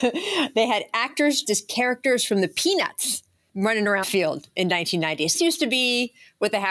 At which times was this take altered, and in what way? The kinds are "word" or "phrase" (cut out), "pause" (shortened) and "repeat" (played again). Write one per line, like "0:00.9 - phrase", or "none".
0:01.4 - word
0:03.5 - word
0:04.0 - word
0:05.3 - word